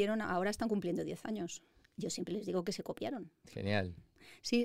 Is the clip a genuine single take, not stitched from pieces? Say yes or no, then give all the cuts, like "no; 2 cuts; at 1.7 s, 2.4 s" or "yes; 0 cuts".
yes; 0 cuts